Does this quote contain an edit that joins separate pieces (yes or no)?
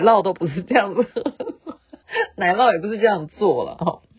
yes